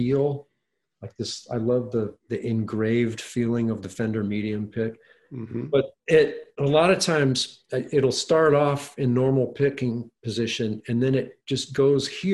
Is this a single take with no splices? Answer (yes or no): no